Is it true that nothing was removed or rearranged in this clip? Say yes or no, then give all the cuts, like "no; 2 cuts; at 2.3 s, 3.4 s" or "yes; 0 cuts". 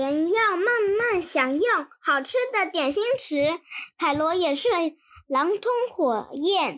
yes; 0 cuts